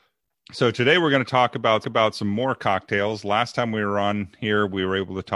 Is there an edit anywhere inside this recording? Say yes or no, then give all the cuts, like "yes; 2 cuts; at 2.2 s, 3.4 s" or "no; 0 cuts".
yes; 1 cut; at 1.8 s